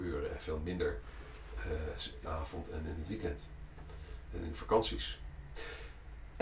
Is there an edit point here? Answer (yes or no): yes